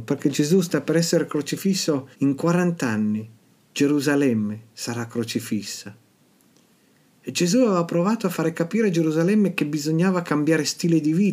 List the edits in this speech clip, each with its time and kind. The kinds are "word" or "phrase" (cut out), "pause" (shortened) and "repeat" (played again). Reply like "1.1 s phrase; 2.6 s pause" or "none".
2.1 s pause